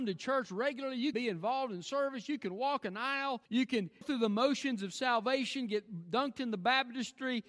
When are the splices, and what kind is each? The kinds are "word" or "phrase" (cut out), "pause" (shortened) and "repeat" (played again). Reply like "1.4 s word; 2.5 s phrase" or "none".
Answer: 1.1 s word; 3.5 s pause; 4.0 s word